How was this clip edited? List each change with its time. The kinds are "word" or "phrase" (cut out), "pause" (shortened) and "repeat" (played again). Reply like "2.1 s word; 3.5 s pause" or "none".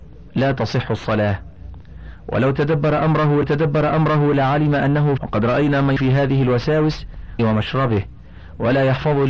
3.4 s repeat; 5.2 s phrase; 6.0 s word; 7.4 s phrase